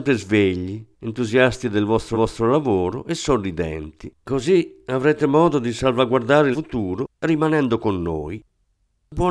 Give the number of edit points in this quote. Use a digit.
3